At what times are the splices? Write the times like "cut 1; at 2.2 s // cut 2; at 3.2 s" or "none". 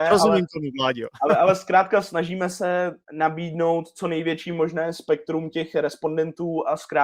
cut 1; at 3.0 s